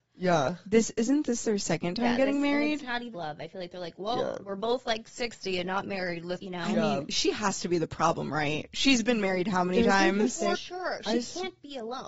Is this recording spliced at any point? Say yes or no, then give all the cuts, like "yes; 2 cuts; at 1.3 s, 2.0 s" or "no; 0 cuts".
yes; 3 cuts; at 3.1 s, 6.4 s, 10.5 s